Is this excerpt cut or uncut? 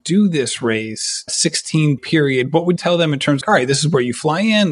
cut